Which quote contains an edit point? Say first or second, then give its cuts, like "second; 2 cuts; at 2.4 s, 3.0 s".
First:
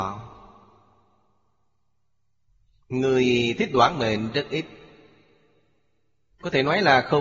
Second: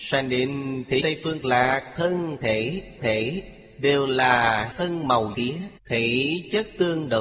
second; 6 cuts; at 1.0 s, 1.4 s, 3.0 s, 4.7 s, 5.3 s, 5.8 s